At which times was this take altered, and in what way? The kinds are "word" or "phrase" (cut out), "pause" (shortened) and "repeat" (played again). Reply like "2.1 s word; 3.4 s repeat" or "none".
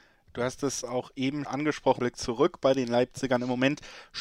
1.4 s word; 2.0 s word